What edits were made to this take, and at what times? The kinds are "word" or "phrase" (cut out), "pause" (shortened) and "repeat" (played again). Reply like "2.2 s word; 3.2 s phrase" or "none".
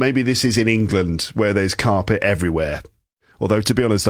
none